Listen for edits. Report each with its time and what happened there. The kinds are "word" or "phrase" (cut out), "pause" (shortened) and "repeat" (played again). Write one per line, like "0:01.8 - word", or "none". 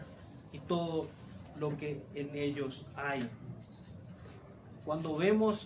none